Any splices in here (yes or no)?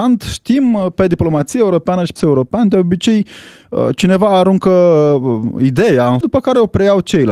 yes